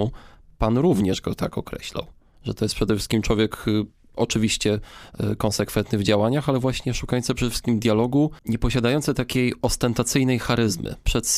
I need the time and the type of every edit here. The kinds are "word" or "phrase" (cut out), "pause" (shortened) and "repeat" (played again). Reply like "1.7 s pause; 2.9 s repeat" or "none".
none